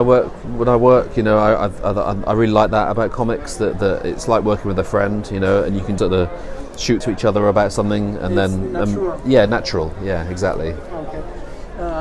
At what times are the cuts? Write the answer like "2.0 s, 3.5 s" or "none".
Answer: 6.0 s, 7.0 s